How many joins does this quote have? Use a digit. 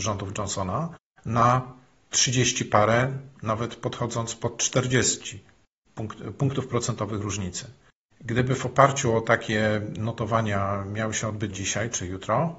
1